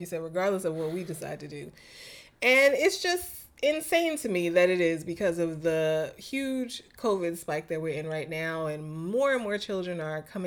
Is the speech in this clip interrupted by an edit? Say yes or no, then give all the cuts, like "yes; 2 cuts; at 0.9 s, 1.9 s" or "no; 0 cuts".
no; 0 cuts